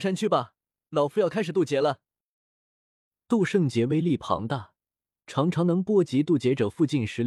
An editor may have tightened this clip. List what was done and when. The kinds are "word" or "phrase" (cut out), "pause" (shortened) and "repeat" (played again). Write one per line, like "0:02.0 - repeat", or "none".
none